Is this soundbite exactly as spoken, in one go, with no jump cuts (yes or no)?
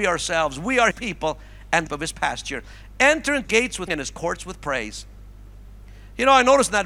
no